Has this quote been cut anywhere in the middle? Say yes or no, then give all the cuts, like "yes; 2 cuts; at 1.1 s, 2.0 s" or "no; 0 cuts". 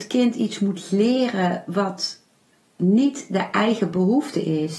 no; 0 cuts